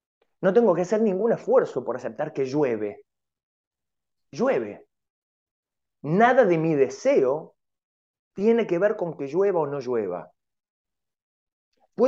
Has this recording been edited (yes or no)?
no